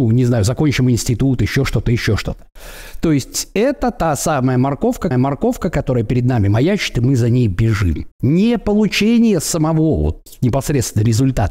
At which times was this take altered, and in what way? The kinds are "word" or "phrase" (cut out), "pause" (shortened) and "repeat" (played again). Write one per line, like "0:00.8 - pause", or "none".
0:05.1 - repeat
0:08.1 - pause